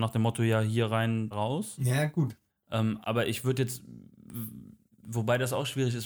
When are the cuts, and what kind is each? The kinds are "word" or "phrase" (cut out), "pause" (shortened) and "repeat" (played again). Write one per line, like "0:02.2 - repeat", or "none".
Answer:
0:01.3 - word
0:03.0 - word